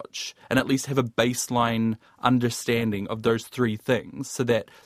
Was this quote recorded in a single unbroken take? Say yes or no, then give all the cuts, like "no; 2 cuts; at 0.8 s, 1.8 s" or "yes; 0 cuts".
yes; 0 cuts